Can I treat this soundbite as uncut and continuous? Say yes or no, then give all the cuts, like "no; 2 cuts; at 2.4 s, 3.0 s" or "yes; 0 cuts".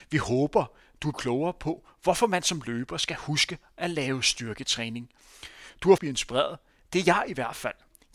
no; 2 cuts; at 1.1 s, 6.0 s